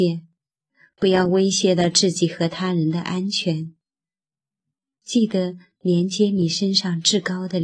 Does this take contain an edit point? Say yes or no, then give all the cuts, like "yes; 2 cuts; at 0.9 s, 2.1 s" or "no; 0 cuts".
no; 0 cuts